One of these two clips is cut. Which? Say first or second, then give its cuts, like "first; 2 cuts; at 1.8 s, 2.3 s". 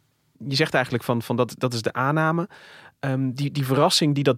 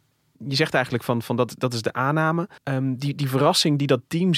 second; 1 cut; at 2.6 s